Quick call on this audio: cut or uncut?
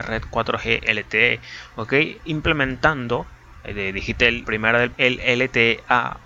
cut